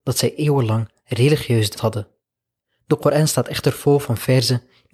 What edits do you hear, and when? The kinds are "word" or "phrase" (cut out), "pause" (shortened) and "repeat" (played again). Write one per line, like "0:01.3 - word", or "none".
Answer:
0:01.8 - word